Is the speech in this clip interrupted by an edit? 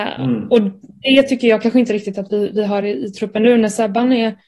no; 0 cuts

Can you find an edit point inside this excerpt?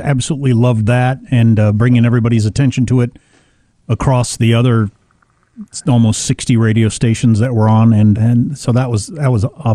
yes; 1 cut; at 8.1 s

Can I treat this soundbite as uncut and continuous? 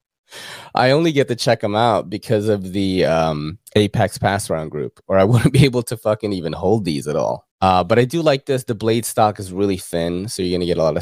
no; 2 cuts; at 3.7 s, 7.5 s

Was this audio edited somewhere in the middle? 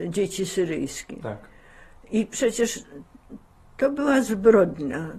no; 0 cuts

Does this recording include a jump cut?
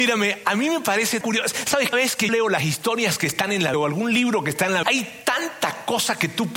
yes; 5 cuts; at 1.2 s, 1.9 s, 2.3 s, 3.7 s, 4.8 s

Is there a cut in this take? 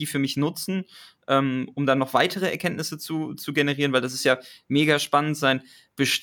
no; 0 cuts

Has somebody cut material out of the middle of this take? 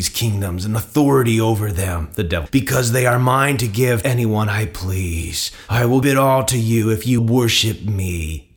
yes; 4 cuts; at 2.5 s, 4.0 s, 6.0 s, 7.2 s

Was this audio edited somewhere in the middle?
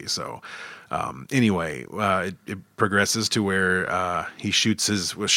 no; 0 cuts

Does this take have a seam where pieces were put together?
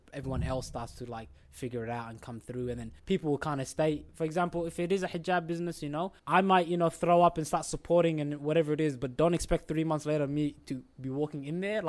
yes; 3 cuts; at 3.0 s, 4.1 s, 6.2 s

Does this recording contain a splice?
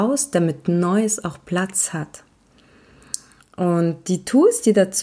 no; 0 cuts

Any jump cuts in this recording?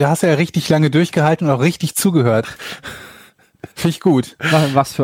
yes; 1 cut; at 3.7 s

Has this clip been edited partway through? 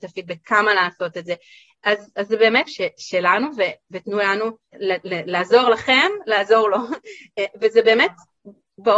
yes; 2 cuts; at 2.7 s, 4.7 s

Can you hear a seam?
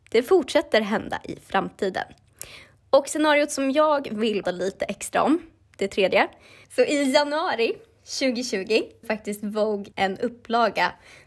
yes; 3 cuts; at 4.4 s, 9.0 s, 9.9 s

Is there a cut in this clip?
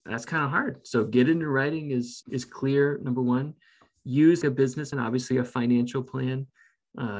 yes; 3 cuts; at 2.2 s, 4.4 s, 4.9 s

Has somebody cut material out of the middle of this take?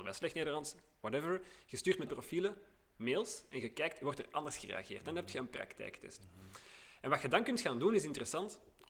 yes; 1 cut; at 2.1 s

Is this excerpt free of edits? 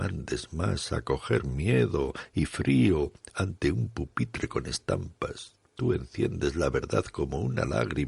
no; 1 cut; at 5.7 s

